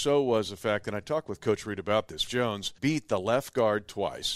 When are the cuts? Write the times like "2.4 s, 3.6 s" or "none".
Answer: 2.3 s, 2.8 s